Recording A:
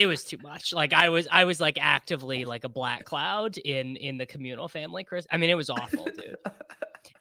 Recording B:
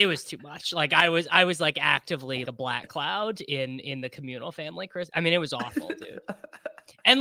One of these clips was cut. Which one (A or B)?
B